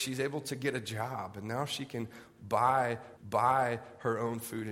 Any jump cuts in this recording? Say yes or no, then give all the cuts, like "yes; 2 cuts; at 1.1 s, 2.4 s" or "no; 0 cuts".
yes; 1 cut; at 3.2 s